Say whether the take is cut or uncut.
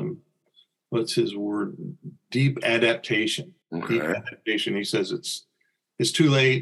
cut